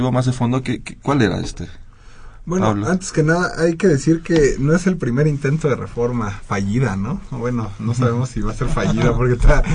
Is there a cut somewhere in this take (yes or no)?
no